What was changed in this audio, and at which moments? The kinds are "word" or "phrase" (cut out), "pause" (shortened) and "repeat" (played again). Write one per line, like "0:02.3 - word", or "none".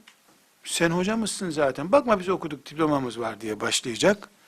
none